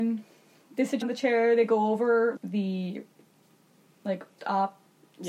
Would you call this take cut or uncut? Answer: cut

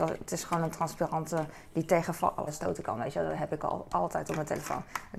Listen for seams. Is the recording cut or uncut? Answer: cut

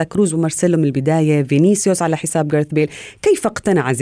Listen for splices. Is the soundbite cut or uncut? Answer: uncut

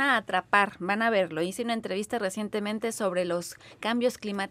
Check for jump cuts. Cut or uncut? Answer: uncut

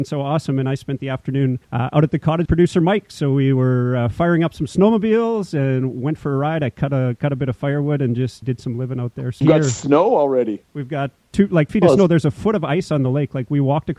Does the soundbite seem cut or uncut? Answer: cut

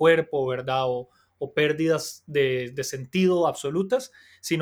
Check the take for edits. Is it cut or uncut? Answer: uncut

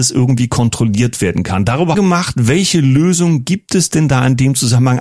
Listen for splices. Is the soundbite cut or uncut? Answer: cut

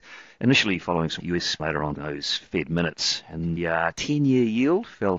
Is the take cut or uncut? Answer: cut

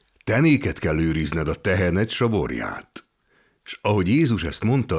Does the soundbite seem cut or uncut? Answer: uncut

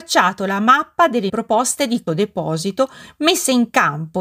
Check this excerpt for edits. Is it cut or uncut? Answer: cut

